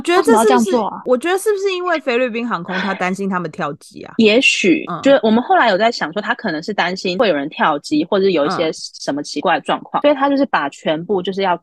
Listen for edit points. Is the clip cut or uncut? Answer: uncut